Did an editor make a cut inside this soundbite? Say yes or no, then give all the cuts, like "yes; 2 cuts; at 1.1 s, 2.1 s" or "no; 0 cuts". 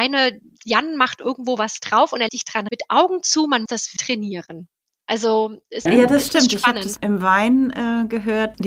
yes; 6 cuts; at 2.3 s, 2.7 s, 3.7 s, 4.0 s, 5.9 s, 7.0 s